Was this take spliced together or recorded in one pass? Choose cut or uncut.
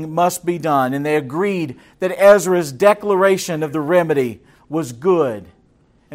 uncut